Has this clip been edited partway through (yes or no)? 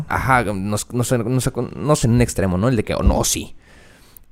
yes